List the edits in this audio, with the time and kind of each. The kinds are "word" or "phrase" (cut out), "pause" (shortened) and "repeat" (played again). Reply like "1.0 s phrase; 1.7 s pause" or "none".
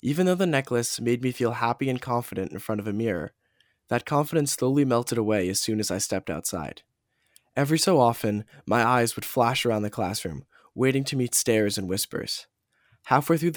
none